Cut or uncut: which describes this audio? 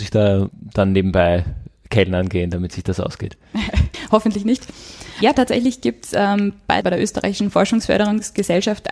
cut